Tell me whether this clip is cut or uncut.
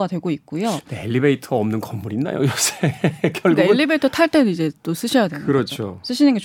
uncut